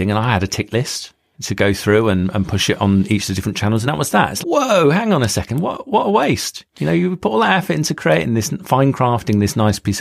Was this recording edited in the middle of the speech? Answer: yes; 2 cuts; at 3.9 s, 4.4 s

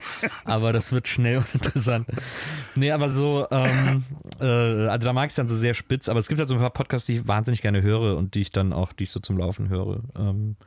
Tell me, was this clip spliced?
no; 0 cuts

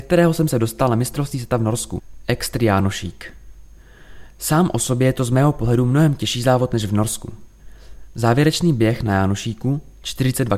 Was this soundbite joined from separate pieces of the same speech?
no; 0 cuts

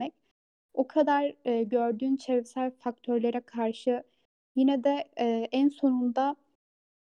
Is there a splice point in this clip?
no; 0 cuts

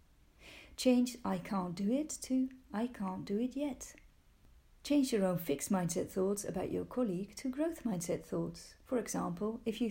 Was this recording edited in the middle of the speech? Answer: no; 0 cuts

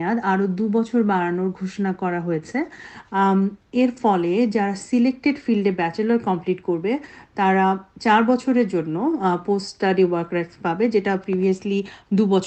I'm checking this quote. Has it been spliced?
no; 0 cuts

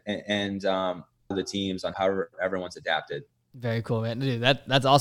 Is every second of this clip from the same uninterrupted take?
no; 2 cuts; at 1.3 s, 1.9 s

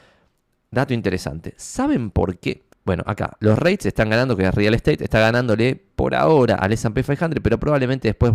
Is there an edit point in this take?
yes; 1 cut; at 2.7 s

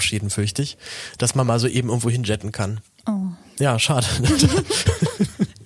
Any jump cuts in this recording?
no; 0 cuts

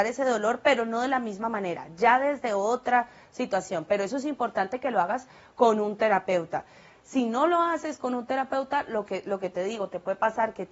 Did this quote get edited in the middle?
no; 0 cuts

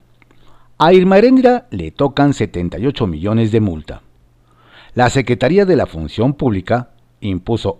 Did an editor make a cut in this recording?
no; 0 cuts

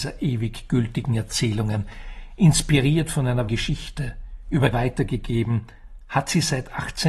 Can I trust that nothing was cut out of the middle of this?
no; 2 cuts; at 3.5 s, 4.7 s

